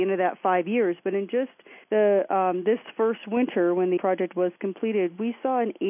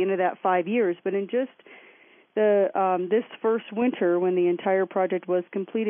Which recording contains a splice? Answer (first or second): first